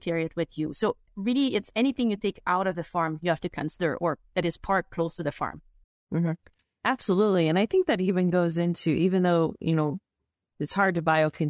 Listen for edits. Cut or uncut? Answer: uncut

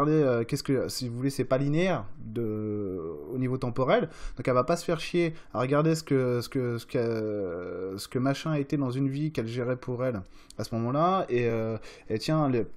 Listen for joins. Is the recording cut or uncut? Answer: uncut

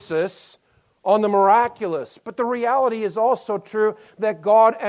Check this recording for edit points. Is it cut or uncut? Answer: uncut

